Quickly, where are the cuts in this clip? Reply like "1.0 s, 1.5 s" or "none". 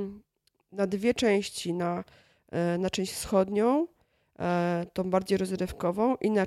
none